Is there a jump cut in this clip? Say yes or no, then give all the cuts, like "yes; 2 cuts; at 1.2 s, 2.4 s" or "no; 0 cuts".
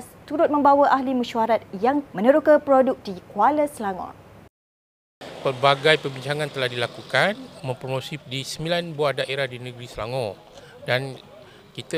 yes; 4 cuts; at 2.1 s, 3.0 s, 7.6 s, 8.2 s